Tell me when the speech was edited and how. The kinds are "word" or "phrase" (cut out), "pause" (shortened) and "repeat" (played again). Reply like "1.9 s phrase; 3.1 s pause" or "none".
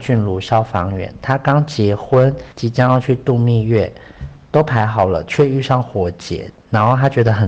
2.5 s pause